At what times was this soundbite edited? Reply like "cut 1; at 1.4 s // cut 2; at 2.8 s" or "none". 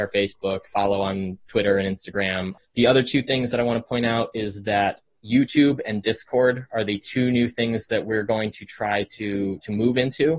cut 1; at 2.6 s